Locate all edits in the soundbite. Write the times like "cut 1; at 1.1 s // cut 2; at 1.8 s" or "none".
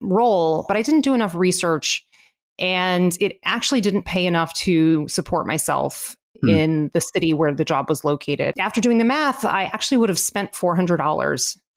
none